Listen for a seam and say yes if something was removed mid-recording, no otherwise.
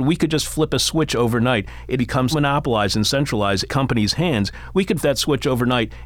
yes